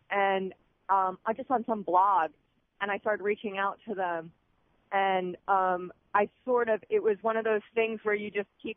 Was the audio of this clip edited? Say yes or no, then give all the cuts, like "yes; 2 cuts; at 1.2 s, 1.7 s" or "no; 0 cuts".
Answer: no; 0 cuts